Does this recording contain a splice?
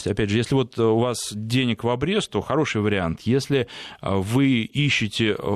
no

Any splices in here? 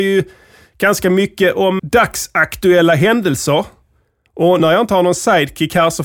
yes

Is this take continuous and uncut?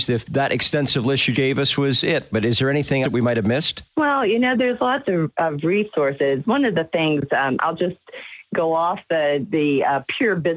no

